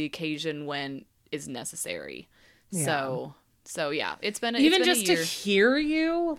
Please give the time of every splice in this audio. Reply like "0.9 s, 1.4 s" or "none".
none

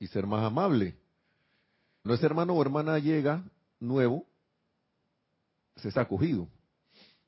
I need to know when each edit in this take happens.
2.0 s, 5.9 s

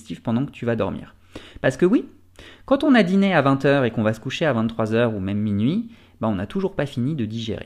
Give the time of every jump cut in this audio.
none

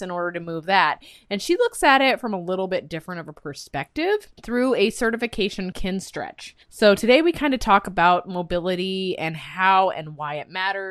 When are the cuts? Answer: 4.4 s, 5.7 s, 6.6 s

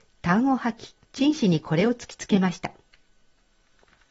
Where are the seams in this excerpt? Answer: 1.0 s

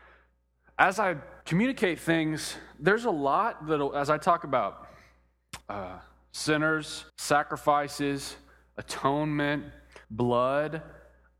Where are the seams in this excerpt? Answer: 1.4 s, 5.6 s, 7.1 s, 10.0 s

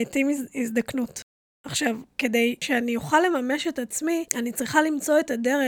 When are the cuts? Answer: 2.1 s, 4.3 s

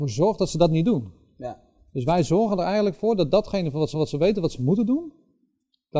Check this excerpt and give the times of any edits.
3.9 s

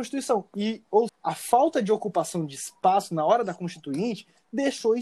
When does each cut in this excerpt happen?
1.1 s

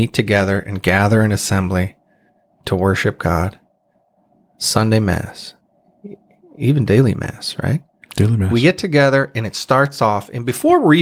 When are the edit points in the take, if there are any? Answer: none

